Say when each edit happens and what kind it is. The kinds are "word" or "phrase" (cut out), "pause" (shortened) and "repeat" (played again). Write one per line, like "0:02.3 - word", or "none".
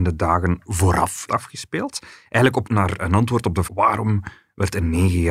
0:01.3 - word
0:02.6 - word
0:03.0 - word
0:03.6 - word